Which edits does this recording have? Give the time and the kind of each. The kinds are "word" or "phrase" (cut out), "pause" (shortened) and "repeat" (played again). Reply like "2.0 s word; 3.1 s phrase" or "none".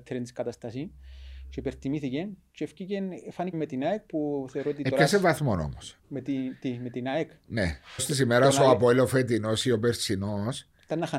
3.5 s phrase; 6.0 s pause; 8.0 s phrase